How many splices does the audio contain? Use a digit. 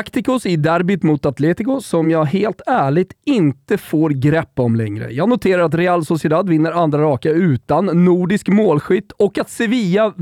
0